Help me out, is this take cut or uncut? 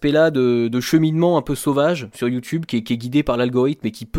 uncut